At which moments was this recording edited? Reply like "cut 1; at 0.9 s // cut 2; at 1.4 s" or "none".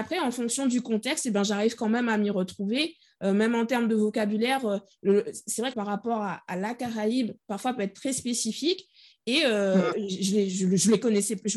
cut 1; at 5.7 s